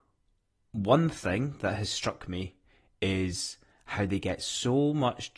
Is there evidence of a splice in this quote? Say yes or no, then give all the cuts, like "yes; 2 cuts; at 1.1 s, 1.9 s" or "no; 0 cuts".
no; 0 cuts